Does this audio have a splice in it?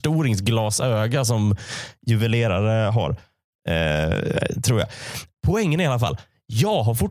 no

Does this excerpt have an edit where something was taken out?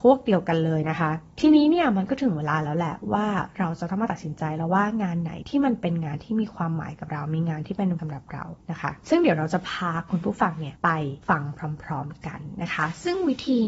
yes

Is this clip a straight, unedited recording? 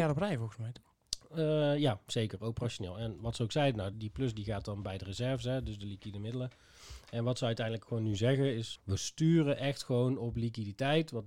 no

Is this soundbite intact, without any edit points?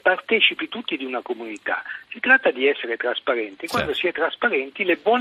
yes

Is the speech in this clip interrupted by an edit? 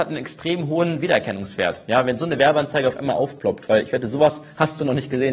no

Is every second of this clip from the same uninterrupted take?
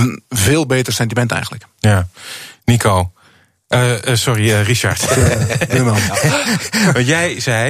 yes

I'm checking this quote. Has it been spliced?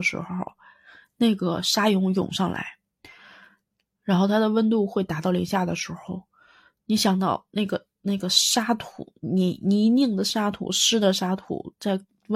no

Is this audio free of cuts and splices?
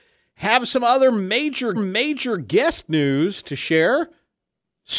no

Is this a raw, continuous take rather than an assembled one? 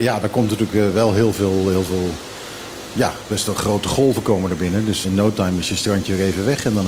no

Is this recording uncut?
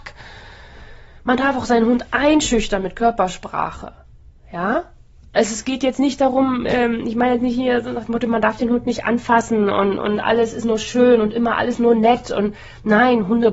yes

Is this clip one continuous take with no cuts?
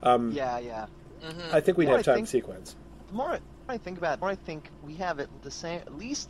no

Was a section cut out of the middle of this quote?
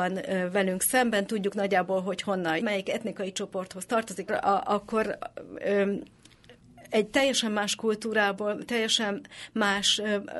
yes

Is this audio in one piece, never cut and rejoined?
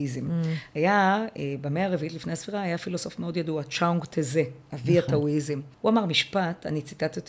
no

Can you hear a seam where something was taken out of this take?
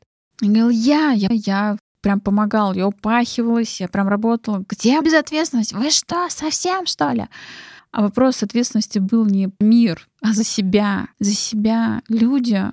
yes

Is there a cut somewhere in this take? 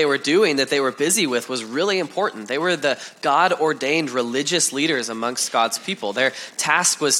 no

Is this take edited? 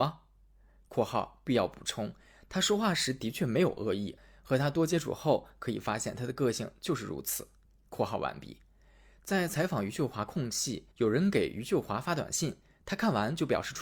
yes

